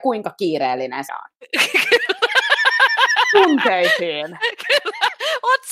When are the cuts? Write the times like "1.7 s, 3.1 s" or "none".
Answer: 1.1 s